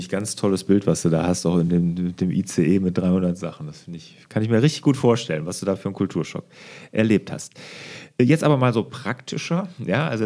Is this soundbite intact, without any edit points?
yes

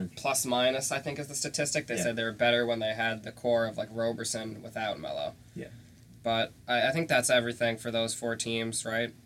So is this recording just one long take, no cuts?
no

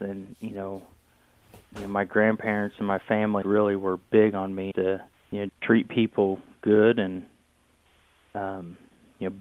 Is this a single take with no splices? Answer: no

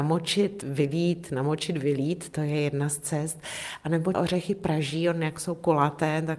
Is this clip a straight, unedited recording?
no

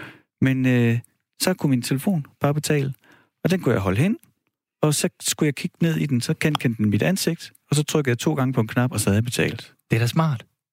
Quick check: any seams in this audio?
no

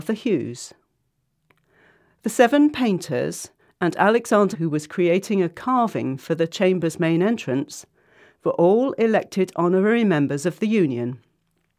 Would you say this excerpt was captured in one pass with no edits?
no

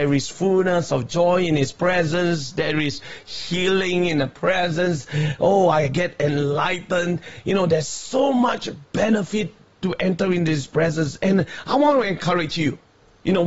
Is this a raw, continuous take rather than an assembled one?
yes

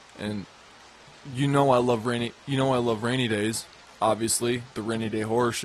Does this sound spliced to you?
no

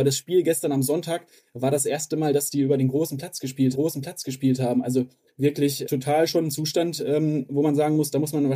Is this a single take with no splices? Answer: no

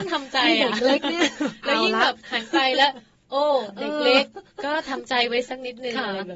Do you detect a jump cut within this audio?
no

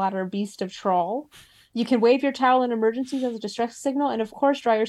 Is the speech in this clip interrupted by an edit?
no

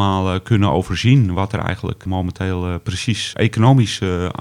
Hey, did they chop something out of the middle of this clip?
yes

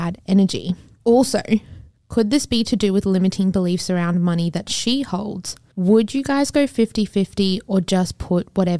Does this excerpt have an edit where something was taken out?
no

